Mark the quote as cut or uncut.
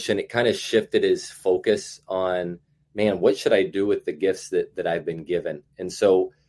uncut